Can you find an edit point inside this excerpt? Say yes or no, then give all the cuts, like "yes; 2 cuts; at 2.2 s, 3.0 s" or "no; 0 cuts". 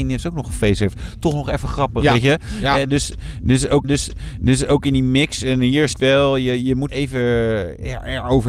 yes; 3 cuts; at 3.8 s, 5.9 s, 6.9 s